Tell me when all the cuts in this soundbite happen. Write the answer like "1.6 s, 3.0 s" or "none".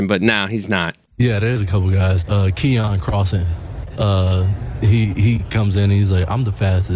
1.1 s